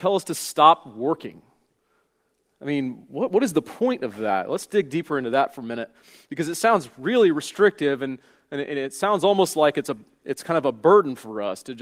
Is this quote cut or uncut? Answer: uncut